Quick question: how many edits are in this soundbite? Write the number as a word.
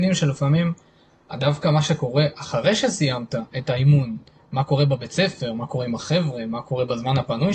one